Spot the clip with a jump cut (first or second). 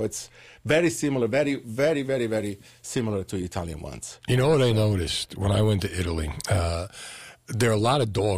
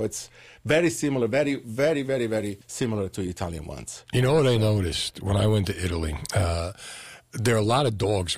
second